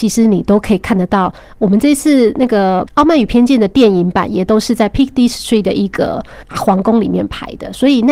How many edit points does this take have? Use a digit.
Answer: 0